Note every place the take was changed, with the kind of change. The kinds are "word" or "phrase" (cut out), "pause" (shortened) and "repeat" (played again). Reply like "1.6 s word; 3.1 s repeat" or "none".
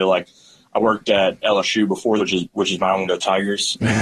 2.2 s word; 3.1 s word